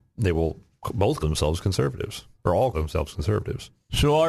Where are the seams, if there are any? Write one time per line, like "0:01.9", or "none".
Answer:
0:01.2
0:02.7